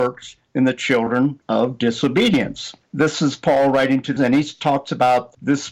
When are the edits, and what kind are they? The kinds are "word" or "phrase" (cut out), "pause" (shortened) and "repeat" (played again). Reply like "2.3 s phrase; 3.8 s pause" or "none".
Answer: 4.2 s word